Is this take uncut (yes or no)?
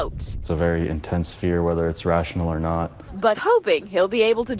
no